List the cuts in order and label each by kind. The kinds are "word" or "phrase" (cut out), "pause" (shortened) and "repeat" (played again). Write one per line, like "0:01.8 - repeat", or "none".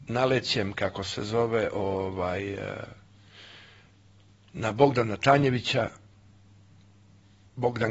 none